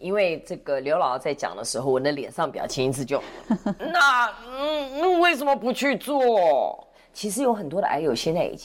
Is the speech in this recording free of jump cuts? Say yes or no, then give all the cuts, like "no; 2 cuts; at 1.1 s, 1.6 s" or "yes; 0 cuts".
yes; 0 cuts